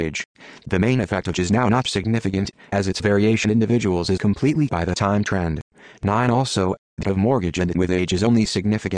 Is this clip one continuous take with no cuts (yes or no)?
no